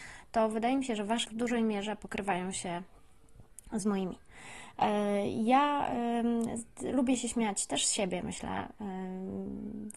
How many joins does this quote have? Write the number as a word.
one